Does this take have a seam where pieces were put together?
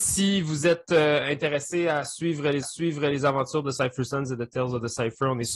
yes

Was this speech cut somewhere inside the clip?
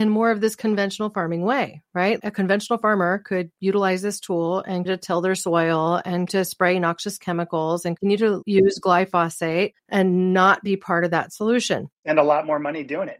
yes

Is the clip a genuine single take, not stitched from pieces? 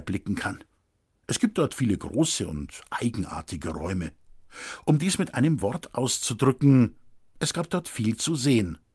yes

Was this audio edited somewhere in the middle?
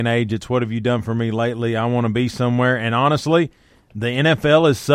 no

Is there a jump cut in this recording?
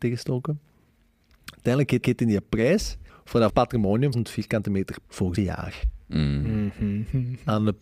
yes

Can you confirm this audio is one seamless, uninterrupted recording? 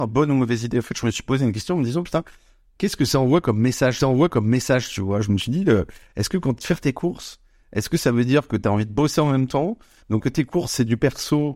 no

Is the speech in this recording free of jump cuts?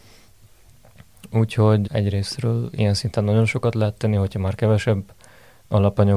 no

